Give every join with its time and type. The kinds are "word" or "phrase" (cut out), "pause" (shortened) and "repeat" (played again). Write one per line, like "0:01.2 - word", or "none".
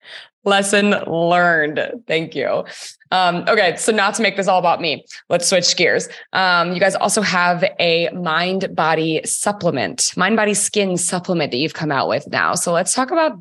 none

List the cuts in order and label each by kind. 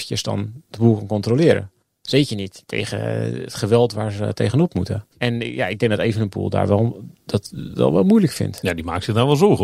0:01.8 - pause
0:05.1 - pause

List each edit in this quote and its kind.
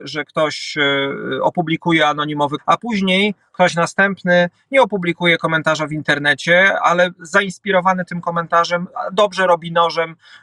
0:02.6 - phrase

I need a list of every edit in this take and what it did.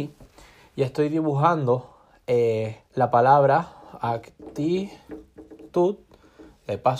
0:02.8 - pause

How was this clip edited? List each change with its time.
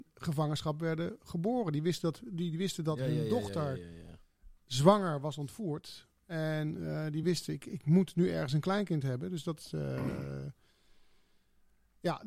none

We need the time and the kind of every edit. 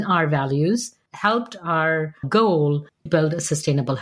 0:01.1 - word
0:02.2 - word
0:03.1 - word

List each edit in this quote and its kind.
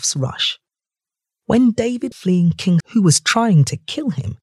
0:02.1 - word
0:02.8 - word

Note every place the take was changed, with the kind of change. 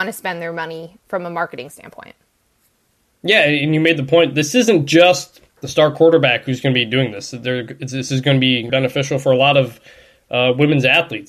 0:05.5 - pause
0:08.7 - word

